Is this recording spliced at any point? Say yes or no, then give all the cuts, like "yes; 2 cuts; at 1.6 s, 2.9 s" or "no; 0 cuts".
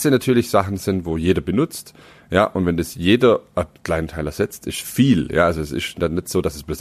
no; 0 cuts